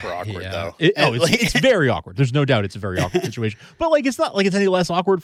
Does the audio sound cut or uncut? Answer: uncut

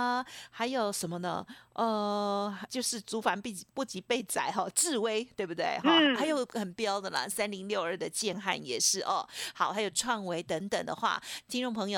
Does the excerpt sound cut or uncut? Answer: cut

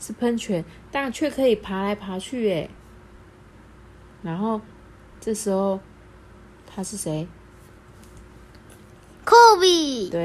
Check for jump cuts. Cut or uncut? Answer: uncut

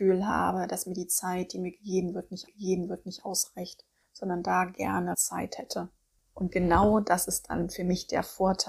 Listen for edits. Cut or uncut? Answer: cut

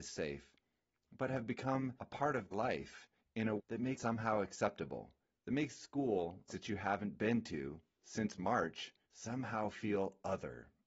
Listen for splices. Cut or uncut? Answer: cut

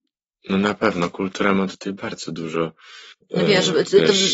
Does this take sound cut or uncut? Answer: uncut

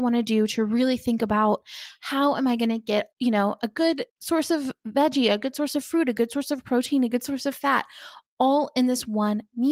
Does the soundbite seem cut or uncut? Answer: cut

